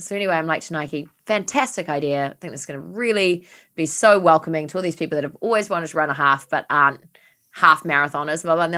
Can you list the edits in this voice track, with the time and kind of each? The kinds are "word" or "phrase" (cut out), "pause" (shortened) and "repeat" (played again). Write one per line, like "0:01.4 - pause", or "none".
none